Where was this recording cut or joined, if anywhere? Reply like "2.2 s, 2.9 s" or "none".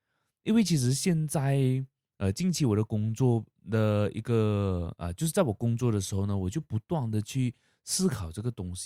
none